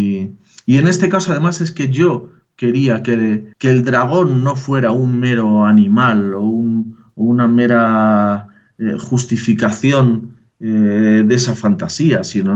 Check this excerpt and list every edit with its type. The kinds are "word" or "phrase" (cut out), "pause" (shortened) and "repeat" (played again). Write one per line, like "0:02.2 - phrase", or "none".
0:03.5 - pause